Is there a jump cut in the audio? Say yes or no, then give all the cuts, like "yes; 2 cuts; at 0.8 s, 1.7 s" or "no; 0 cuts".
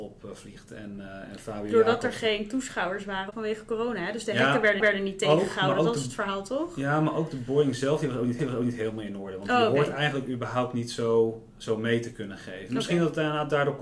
yes; 2 cuts; at 4.8 s, 8.4 s